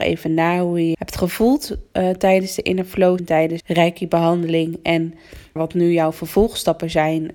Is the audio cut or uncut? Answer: cut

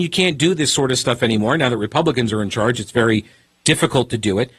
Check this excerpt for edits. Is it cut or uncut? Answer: uncut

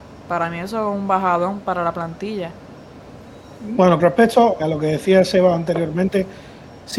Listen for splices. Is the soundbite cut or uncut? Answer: cut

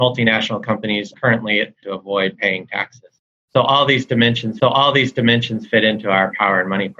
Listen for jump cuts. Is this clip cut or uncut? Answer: cut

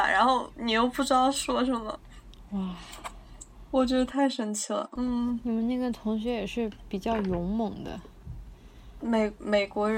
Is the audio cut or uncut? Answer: uncut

